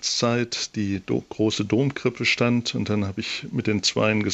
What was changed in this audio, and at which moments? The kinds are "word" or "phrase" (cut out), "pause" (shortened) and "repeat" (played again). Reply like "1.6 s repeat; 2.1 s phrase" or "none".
none